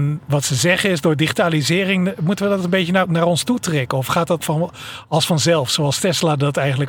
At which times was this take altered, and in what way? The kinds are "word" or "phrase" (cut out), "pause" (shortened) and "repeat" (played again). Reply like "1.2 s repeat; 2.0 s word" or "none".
3.0 s word; 4.4 s word